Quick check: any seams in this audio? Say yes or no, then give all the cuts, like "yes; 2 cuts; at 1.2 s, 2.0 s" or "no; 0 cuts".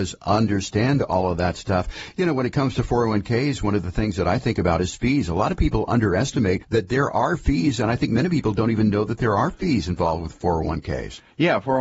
no; 0 cuts